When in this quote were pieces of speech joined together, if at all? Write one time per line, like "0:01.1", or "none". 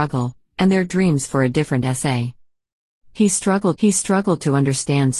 0:03.8